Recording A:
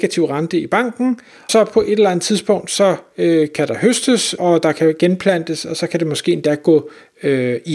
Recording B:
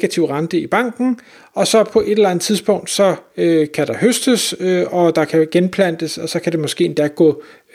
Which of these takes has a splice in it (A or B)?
A